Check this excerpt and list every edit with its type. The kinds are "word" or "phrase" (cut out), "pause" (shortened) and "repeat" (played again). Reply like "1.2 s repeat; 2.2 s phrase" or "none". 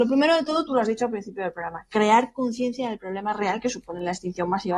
none